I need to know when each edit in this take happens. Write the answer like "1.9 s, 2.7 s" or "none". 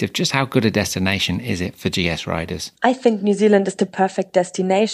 2.8 s